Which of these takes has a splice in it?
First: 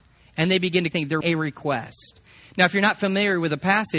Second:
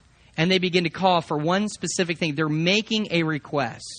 first; 2 cuts; at 0.9 s, 1.2 s

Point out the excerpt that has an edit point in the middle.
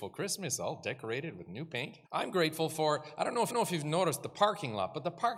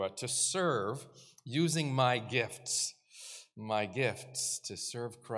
first; 2 cuts; at 2.0 s, 3.5 s

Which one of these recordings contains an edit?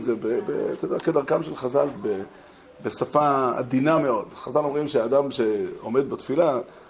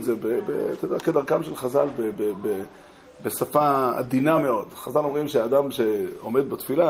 first; 1 cut; at 2.0 s

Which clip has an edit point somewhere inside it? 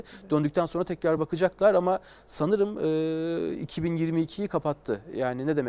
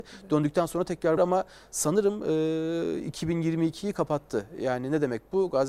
second; 1 cut; at 1.2 s

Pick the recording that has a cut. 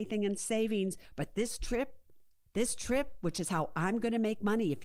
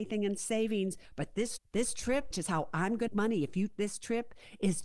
second; 4 cuts; at 1.6 s, 2.3 s, 3.1 s, 3.7 s

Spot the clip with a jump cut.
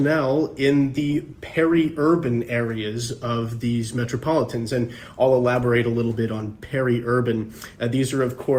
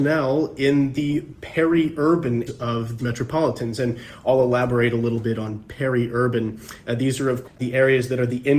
second; 3 cuts; at 2.5 s, 3.0 s, 7.4 s

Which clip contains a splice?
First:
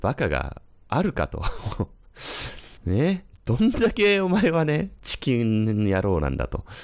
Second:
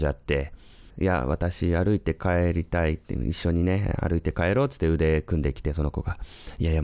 first; 1 cut; at 2.8 s

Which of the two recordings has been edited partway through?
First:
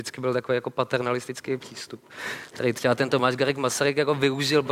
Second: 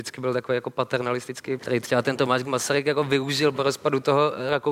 second; 2 cuts; at 1.6 s, 2.4 s

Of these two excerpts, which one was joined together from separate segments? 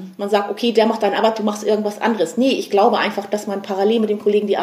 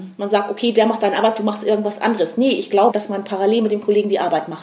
second; 1 cut; at 2.9 s

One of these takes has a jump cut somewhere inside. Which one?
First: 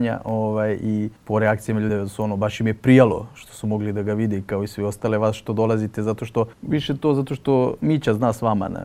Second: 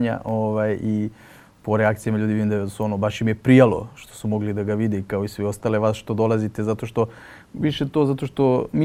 first; 3 cuts; at 1.2 s, 1.9 s, 6.5 s

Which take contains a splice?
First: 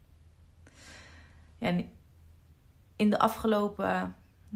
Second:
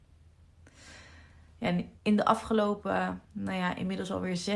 second; 2 cuts; at 2.0 s, 3.2 s

